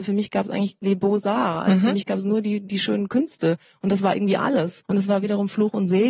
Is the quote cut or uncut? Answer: uncut